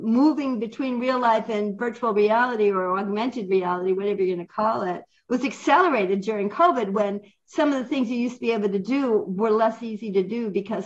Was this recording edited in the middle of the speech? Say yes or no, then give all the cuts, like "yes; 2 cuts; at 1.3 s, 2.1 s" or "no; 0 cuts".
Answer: no; 0 cuts